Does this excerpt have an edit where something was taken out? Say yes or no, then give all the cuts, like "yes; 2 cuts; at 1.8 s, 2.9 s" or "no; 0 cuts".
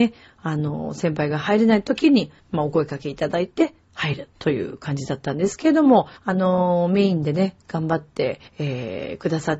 yes; 3 cuts; at 2.4 s, 6.2 s, 8.5 s